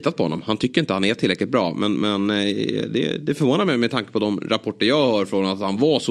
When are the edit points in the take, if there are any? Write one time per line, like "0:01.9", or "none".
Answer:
none